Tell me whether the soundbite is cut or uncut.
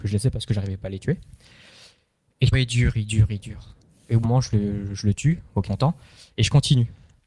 cut